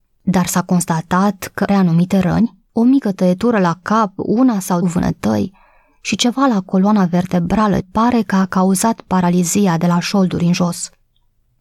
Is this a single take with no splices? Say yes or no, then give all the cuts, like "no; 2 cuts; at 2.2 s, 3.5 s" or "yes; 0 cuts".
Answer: no; 4 cuts; at 1.7 s, 2.7 s, 4.8 s, 7.8 s